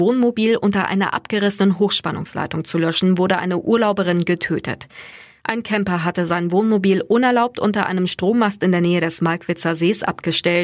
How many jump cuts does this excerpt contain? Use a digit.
0